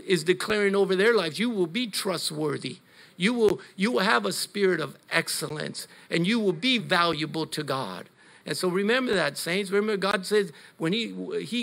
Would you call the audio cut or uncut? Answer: cut